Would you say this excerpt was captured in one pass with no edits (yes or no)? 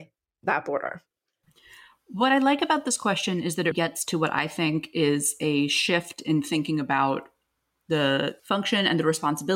no